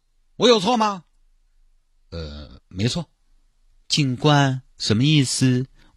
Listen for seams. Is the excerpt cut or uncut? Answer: uncut